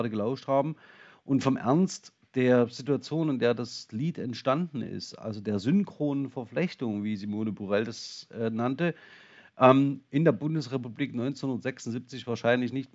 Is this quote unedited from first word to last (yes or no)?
yes